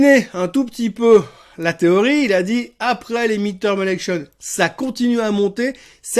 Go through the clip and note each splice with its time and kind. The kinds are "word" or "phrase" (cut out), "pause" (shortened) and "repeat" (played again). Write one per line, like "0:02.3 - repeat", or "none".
none

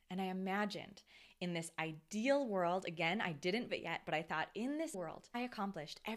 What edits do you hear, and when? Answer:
0:03.7 - word
0:04.9 - word

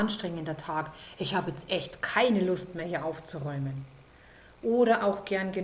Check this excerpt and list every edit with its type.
none

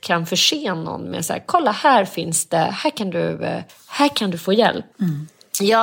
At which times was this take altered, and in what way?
0:03.7 - pause

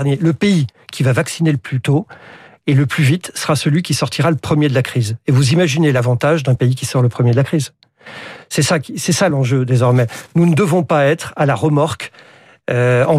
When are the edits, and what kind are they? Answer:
none

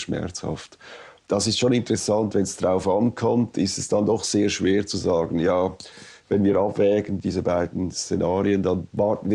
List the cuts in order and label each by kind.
none

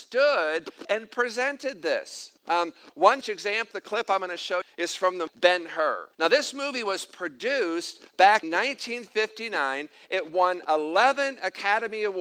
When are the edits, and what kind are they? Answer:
0:02.4 - pause
0:03.2 - word
0:03.7 - phrase
0:04.6 - phrase
0:05.3 - word
0:06.1 - pause
0:08.4 - word

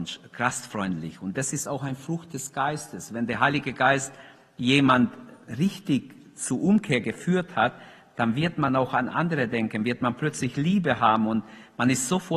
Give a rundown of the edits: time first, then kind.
none

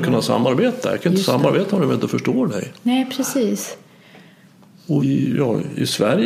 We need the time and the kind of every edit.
0:05.0 - phrase

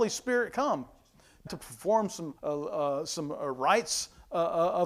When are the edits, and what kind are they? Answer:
0:01.5 - phrase
0:02.4 - pause

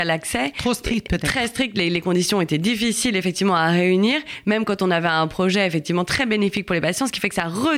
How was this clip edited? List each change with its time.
none

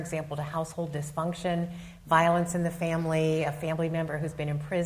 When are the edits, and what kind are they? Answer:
none

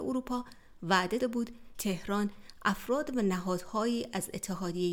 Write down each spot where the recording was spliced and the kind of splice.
0:01.2 - word
0:01.7 - word

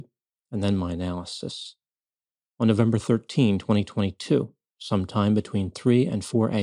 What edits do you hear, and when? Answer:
none

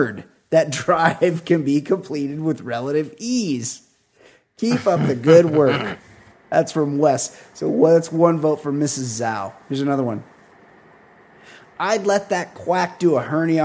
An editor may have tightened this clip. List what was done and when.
none

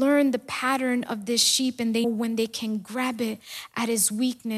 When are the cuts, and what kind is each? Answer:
0:02.0 - word

